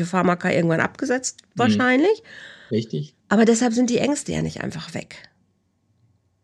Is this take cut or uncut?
cut